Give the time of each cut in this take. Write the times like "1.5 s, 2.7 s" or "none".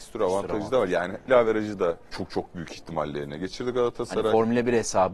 1.3 s, 2.1 s